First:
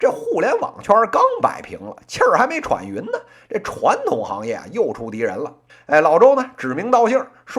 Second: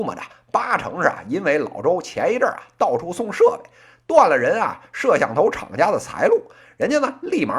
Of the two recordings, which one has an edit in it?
first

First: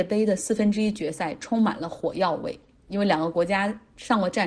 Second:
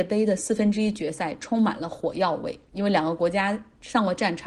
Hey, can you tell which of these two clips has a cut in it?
second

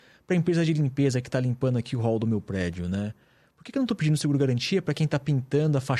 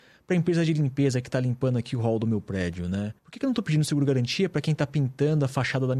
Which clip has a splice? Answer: second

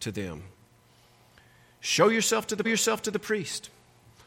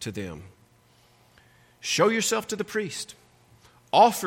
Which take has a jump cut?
first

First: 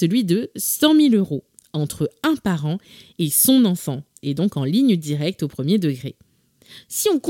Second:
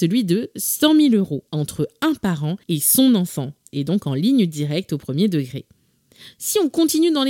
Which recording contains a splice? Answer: second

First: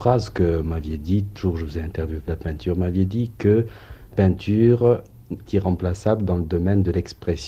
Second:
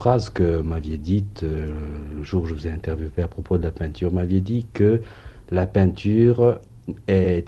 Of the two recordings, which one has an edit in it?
first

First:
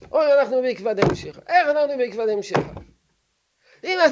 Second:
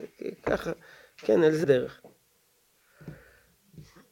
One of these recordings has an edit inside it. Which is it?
second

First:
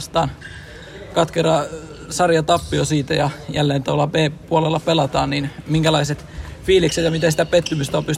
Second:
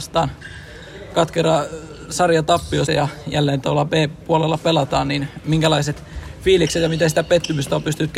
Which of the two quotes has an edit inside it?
second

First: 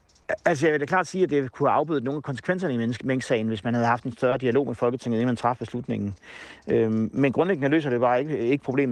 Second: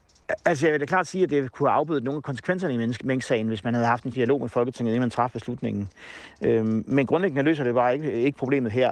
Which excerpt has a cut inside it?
second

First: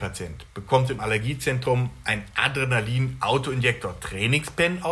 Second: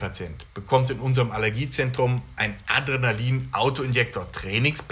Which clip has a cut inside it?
first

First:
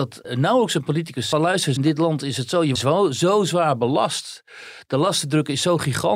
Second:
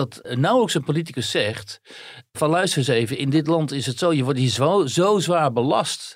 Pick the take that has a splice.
first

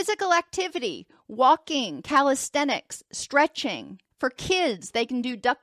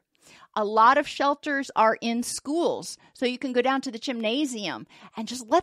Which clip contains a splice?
first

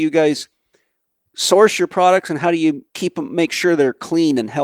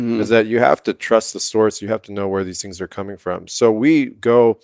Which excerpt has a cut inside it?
first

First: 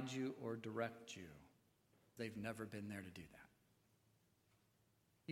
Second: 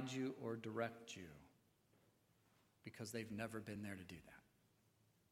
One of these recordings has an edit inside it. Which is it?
first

